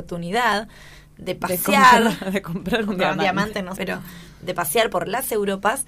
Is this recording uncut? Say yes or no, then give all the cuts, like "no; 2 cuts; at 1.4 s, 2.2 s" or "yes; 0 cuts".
no; 1 cut; at 3.8 s